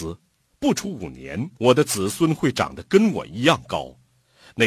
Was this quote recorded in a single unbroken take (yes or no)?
no